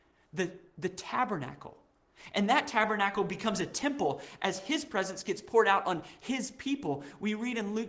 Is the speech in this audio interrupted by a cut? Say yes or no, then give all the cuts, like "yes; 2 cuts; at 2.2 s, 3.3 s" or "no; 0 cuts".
no; 0 cuts